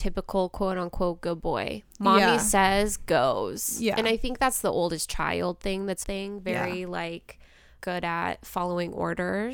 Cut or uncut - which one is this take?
cut